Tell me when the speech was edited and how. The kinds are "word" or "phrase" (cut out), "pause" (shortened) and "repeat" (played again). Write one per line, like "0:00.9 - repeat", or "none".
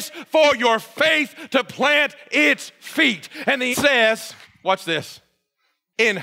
0:03.7 - word
0:04.4 - pause